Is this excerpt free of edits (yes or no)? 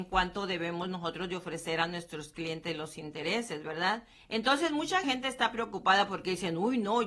no